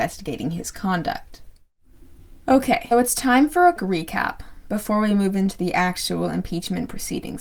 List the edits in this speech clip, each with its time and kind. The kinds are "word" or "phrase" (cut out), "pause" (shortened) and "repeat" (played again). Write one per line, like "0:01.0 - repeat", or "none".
0:02.9 - word
0:03.8 - word